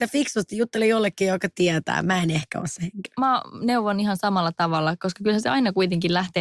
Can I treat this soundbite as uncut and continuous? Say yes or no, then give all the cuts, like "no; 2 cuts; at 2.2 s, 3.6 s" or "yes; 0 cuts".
yes; 0 cuts